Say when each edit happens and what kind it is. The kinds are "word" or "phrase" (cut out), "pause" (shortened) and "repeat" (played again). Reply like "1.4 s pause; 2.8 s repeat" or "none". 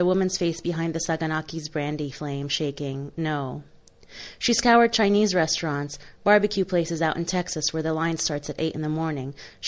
none